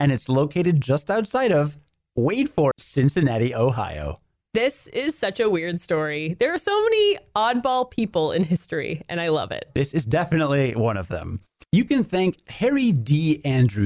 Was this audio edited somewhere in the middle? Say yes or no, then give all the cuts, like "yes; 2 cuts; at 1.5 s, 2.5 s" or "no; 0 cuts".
yes; 1 cut; at 2.7 s